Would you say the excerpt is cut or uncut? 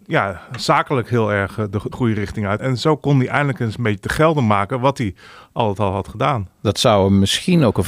cut